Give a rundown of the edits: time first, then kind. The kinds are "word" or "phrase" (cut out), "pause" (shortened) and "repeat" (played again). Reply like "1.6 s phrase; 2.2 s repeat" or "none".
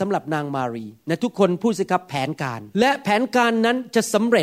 2.7 s pause